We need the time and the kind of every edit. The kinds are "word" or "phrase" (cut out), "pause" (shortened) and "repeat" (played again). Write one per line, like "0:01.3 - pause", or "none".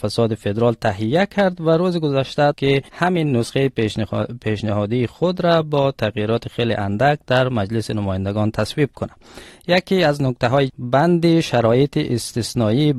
0:02.5 - word
0:02.9 - pause
0:10.7 - phrase